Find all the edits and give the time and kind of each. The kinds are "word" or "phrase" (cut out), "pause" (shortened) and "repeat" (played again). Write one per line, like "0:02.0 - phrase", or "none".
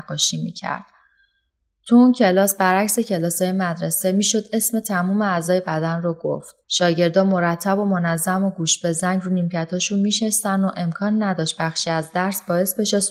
0:06.6 - pause